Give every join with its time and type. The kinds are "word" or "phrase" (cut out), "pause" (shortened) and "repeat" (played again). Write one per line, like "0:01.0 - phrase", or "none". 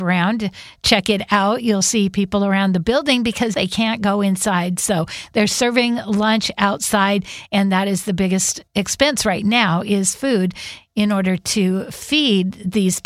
0:03.5 - word
0:08.7 - pause